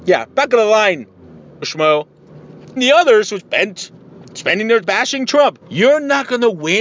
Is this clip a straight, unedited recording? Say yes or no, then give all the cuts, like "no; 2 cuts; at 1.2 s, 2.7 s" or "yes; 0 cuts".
no; 5 cuts; at 1.6 s, 2.8 s, 3.4 s, 4.8 s, 5.6 s